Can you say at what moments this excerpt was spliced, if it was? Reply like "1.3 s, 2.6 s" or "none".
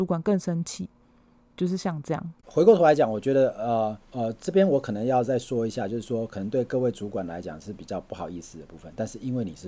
2.4 s, 4.0 s